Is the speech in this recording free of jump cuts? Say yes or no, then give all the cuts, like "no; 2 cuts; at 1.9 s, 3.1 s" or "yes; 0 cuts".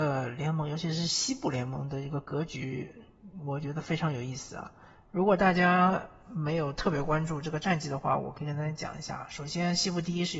yes; 0 cuts